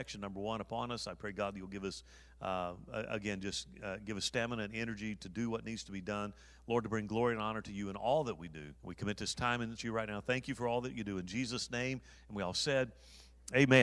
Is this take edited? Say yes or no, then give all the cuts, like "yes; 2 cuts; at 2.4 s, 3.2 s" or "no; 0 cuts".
yes; 2 cuts; at 8.8 s, 9.8 s